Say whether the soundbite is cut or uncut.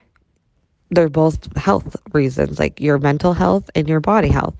uncut